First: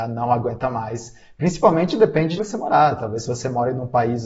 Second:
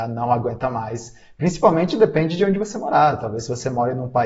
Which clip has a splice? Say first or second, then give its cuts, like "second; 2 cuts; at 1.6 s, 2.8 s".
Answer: first; 1 cut; at 2.4 s